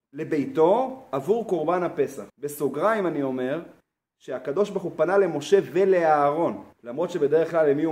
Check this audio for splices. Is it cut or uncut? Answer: cut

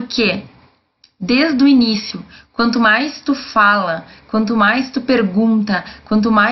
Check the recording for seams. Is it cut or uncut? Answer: uncut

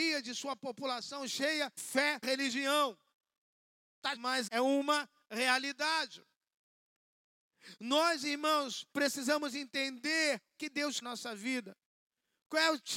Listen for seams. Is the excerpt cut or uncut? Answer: cut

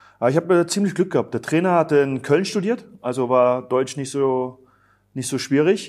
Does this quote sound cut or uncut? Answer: uncut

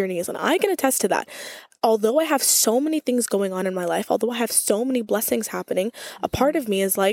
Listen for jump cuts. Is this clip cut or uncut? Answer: uncut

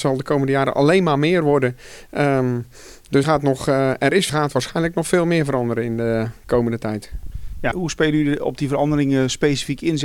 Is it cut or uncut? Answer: cut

